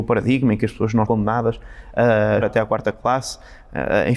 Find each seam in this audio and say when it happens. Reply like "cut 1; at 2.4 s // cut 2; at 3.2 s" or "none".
cut 1; at 1.0 s // cut 2; at 2.4 s